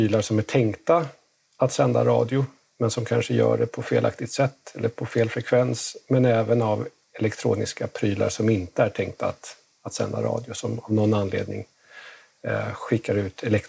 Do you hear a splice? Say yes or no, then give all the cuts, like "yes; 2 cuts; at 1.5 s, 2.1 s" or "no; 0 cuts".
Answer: no; 0 cuts